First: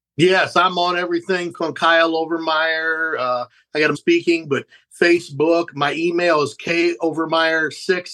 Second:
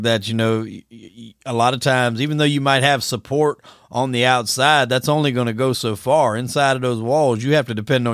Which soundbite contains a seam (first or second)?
first